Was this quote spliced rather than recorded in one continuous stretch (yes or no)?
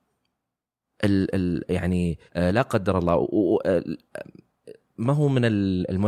yes